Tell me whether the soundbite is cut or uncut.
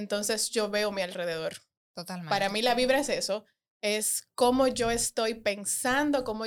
uncut